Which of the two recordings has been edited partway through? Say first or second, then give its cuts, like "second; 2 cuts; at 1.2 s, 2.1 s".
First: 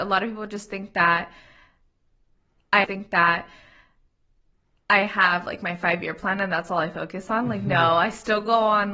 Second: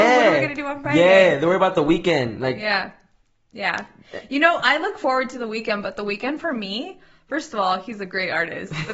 first; 1 cut; at 2.8 s